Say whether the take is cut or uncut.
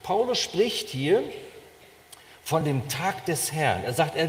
uncut